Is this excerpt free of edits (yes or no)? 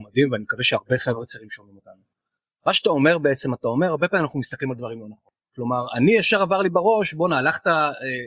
yes